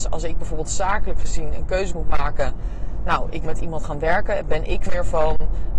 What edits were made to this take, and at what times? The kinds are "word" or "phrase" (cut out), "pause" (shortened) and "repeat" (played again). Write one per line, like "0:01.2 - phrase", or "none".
0:03.5 - word
0:04.9 - word